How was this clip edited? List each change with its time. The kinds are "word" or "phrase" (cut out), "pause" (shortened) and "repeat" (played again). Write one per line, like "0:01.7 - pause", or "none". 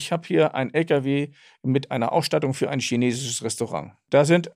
none

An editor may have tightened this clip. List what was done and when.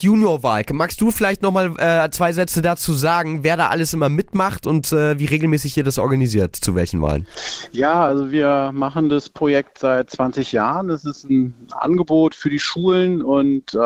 none

